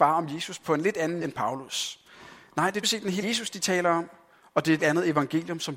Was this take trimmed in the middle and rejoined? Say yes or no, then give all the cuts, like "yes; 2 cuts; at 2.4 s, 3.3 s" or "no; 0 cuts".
yes; 4 cuts; at 1.2 s, 2.8 s, 3.2 s, 4.8 s